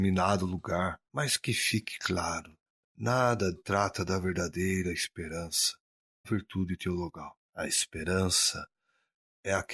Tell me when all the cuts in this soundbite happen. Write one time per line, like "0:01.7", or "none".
0:01.1
0:03.5
0:06.2
0:07.5